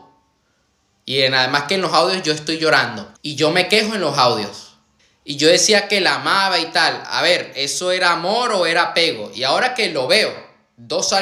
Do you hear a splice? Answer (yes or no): yes